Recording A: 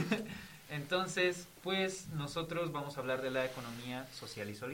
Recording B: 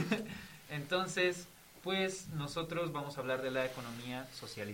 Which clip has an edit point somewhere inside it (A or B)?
A